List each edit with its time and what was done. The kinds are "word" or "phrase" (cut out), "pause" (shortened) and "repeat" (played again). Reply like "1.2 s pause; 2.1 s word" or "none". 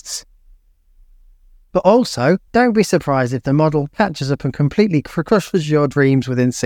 2.5 s pause